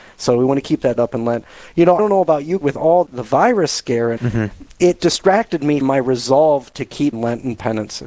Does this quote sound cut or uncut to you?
cut